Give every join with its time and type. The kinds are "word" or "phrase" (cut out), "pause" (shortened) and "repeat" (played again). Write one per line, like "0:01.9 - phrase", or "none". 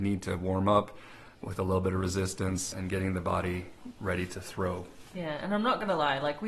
0:02.7 - word